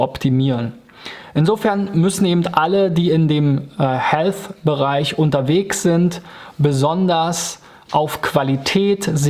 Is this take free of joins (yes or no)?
yes